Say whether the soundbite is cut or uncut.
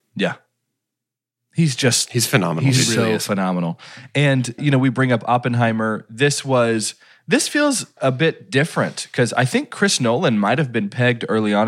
cut